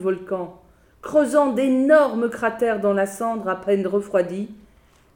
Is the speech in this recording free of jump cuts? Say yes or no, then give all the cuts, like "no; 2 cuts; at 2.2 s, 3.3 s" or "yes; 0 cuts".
yes; 0 cuts